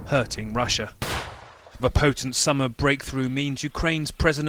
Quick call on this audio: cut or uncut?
cut